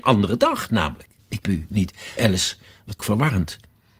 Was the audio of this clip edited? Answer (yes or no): yes